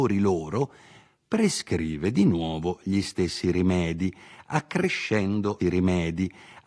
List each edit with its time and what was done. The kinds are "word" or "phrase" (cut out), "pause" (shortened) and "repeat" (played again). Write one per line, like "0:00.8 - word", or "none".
0:05.6 - repeat